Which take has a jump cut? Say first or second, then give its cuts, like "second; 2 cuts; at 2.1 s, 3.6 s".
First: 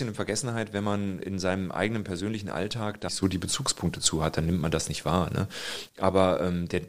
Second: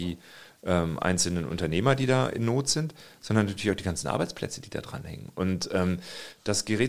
first; 1 cut; at 3.1 s